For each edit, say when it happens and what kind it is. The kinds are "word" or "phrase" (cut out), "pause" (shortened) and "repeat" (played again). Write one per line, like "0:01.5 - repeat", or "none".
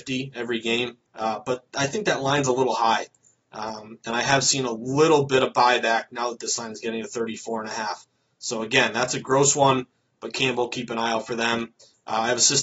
0:01.1 - pause